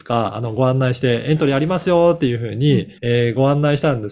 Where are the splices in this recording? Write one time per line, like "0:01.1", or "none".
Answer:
0:03.0

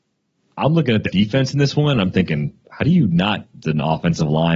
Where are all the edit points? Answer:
0:01.1
0:02.6
0:03.6

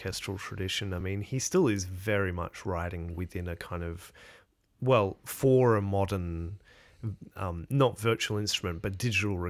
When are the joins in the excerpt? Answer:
none

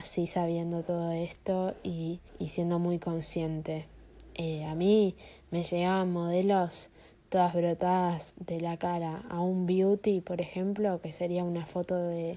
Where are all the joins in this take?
none

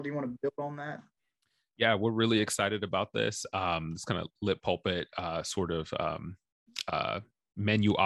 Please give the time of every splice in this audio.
none

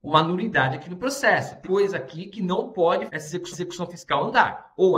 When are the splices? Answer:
0:01.6
0:03.1
0:03.5

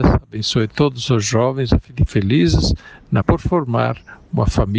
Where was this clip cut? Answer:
0:02.1
0:03.2

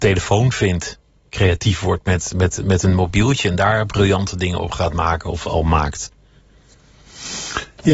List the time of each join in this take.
none

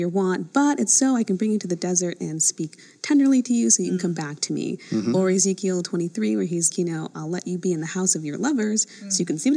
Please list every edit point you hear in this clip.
0:06.7

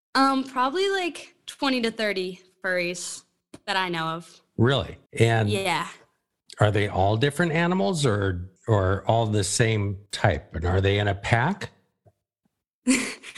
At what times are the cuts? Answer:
0:05.1
0:08.6
0:10.1

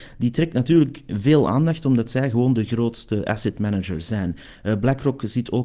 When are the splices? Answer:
none

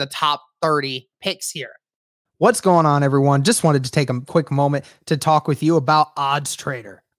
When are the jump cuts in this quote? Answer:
none

